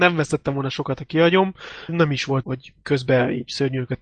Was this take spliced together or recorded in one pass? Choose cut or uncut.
cut